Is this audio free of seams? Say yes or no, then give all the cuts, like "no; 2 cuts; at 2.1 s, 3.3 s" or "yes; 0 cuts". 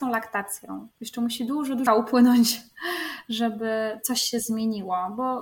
no; 2 cuts; at 0.9 s, 1.9 s